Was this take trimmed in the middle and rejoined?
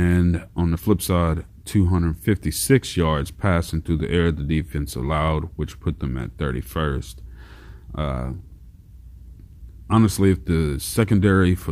no; 0 cuts

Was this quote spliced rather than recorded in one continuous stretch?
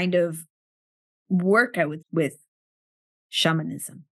yes; 1 cut; at 2.0 s

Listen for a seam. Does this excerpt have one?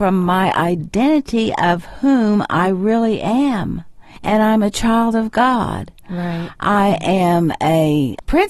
no; 0 cuts

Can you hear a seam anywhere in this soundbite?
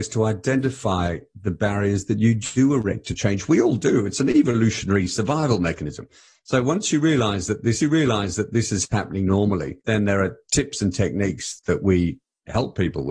yes; 2 cuts; at 7.8 s, 9.8 s

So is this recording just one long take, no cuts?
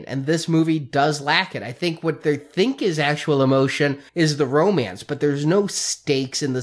no; 1 cut; at 4.1 s

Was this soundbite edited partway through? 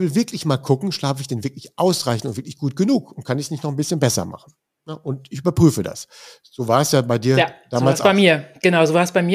no; 0 cuts

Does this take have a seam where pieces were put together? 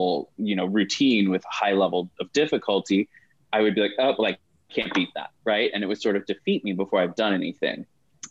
no; 0 cuts

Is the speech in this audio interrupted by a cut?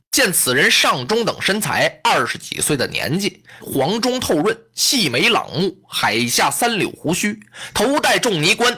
yes; 1 cut; at 3.6 s

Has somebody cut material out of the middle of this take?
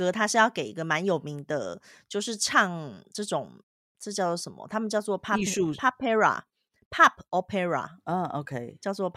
no; 0 cuts

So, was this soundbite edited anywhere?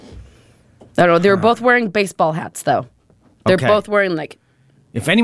no; 0 cuts

